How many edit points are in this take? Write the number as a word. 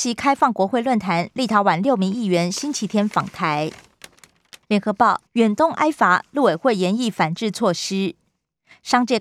two